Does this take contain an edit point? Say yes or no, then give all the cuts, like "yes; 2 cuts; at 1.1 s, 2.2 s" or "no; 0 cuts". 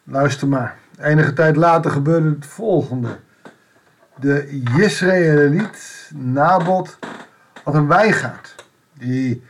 no; 0 cuts